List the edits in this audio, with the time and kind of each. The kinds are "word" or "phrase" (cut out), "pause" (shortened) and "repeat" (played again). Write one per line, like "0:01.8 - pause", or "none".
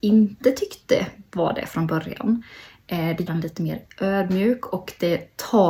0:03.3 - word

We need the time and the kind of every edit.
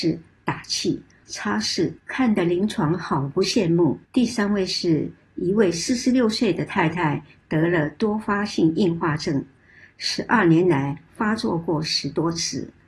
0:01.2 - phrase
0:02.0 - pause
0:04.0 - pause

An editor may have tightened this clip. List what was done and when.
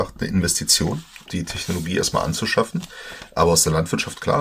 0:01.3 - phrase

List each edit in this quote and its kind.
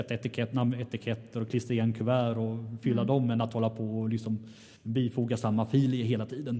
0:04.8 - pause

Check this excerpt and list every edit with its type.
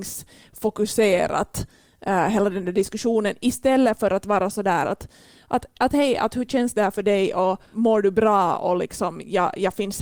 none

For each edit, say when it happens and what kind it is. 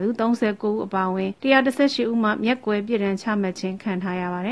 0:01.4 - pause

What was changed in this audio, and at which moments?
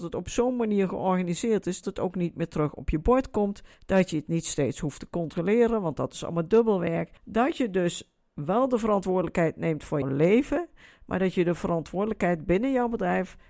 0:01.8 - word
0:03.7 - pause
0:07.2 - pause
0:10.0 - word

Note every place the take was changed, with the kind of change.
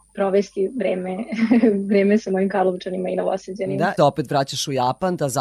0:02.5 - word
0:04.0 - phrase

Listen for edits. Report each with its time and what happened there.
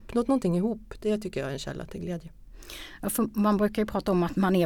none

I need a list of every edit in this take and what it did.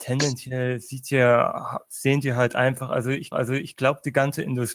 0:03.3 - repeat

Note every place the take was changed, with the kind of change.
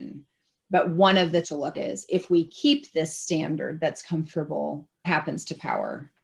0:01.4 - word
0:01.7 - word
0:05.0 - word

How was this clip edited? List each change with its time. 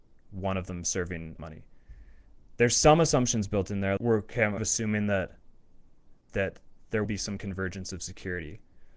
0:01.4 - word
0:04.0 - word
0:04.6 - phrase
0:07.0 - word

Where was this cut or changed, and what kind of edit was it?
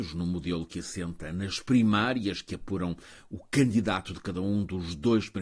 none

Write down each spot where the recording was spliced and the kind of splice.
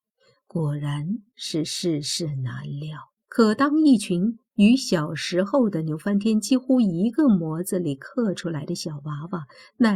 0:03.2 - pause

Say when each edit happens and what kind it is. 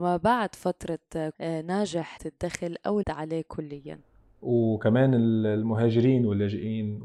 0:01.3 - phrase
0:02.2 - word
0:03.0 - word

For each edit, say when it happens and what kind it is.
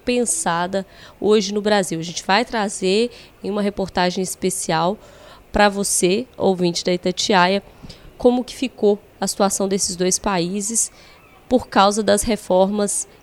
none

